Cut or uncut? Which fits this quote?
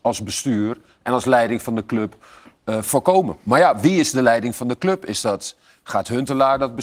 uncut